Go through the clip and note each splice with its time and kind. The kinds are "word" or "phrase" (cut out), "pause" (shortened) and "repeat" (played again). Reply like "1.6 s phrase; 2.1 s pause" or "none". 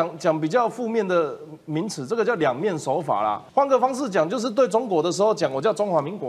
3.5 s pause